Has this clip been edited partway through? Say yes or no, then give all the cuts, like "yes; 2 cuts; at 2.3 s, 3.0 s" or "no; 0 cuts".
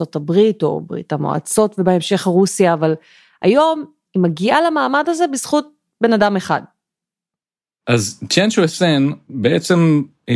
no; 0 cuts